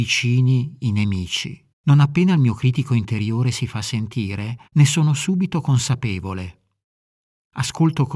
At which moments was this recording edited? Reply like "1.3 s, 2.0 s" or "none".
1.7 s, 4.7 s